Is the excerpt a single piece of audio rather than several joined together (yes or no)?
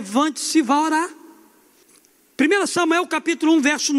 no